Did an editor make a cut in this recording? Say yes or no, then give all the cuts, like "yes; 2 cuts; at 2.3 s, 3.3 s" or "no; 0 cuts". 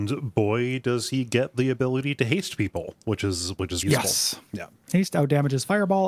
yes; 2 cuts; at 3.8 s, 4.5 s